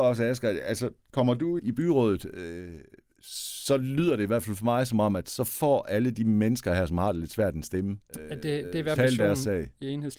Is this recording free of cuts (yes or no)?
no